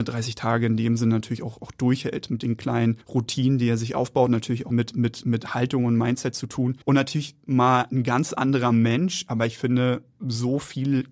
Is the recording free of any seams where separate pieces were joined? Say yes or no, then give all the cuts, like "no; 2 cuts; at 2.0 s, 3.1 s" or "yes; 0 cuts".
no; 3 cuts; at 3.0 s, 4.7 s, 6.8 s